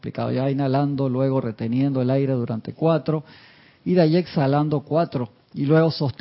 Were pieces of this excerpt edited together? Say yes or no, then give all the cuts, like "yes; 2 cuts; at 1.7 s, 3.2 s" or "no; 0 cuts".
no; 0 cuts